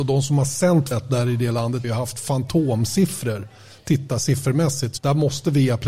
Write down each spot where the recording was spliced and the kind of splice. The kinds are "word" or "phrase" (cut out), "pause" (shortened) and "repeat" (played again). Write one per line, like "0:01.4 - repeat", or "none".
0:00.9 - word
0:01.8 - word
0:05.0 - word